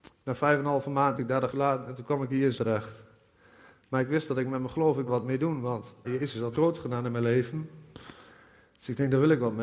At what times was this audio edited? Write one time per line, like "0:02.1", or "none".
0:01.2
0:01.5
0:02.6
0:05.1
0:06.0
0:06.5